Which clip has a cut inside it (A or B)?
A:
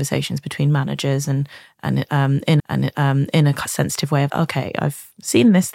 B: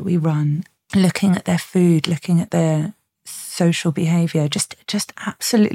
A